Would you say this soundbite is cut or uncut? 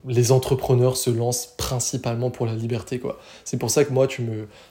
uncut